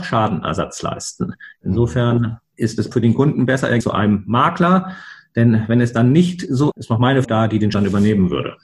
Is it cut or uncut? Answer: cut